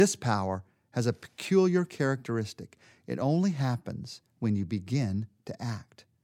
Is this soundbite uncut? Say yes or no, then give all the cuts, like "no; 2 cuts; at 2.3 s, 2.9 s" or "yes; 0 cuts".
yes; 0 cuts